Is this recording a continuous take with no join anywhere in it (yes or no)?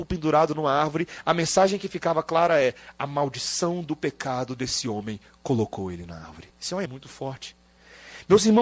no